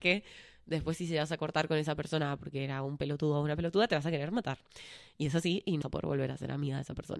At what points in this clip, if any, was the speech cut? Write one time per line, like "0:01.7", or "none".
0:05.8